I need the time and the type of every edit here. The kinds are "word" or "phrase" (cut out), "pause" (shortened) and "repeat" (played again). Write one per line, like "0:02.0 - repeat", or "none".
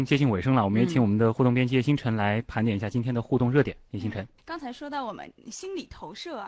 0:04.4 - pause